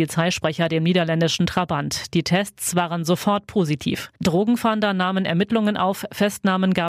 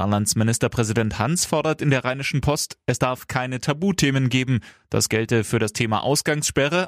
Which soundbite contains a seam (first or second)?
first